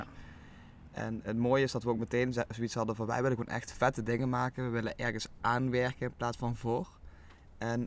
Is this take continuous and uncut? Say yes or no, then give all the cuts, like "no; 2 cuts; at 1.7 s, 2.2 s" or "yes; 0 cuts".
yes; 0 cuts